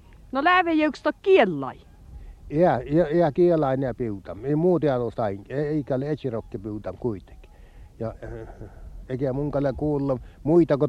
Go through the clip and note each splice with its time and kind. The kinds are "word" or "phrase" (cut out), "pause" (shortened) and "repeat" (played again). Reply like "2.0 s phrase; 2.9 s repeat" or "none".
none

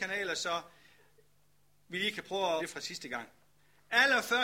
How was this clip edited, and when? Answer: 2.6 s word

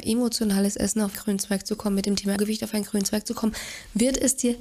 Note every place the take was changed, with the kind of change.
1.1 s word; 2.4 s word

